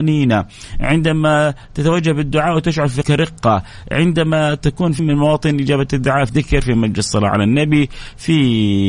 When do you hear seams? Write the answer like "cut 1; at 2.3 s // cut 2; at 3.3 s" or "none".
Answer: cut 1; at 3.0 s // cut 2; at 5.0 s // cut 3; at 6.3 s